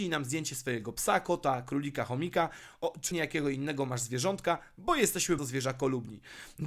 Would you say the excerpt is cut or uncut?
cut